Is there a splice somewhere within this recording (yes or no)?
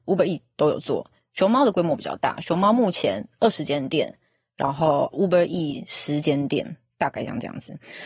no